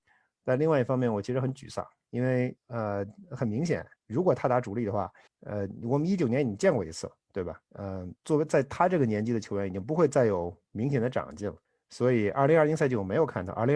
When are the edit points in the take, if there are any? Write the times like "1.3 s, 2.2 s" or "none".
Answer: 2.6 s, 4.0 s, 5.3 s, 7.2 s, 7.7 s, 8.2 s, 10.7 s, 11.6 s